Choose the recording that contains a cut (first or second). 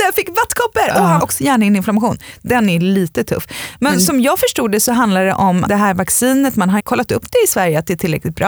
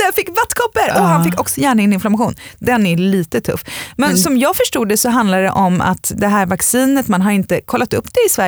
first